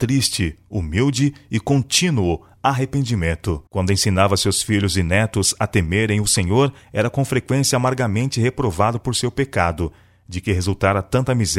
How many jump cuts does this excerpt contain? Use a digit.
2